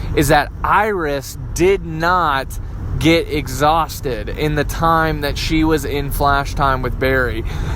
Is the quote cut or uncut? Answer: uncut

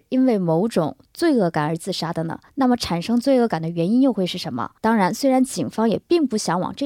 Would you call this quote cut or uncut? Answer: cut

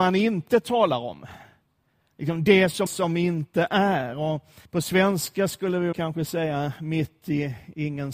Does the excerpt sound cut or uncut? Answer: cut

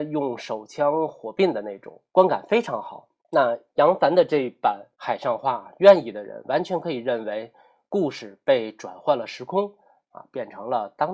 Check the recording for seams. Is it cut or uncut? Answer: cut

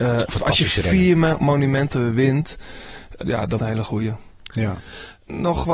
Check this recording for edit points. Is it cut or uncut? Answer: cut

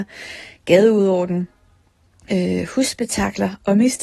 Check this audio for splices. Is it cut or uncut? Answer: uncut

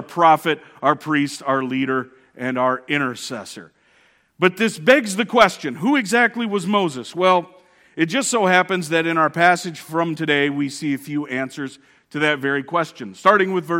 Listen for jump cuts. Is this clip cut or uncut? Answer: uncut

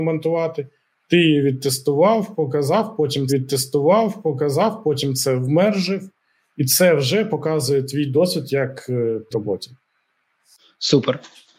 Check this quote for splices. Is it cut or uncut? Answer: cut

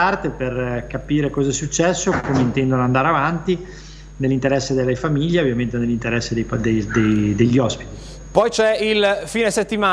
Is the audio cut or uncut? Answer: uncut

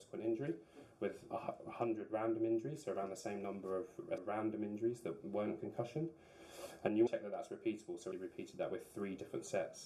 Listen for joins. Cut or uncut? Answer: cut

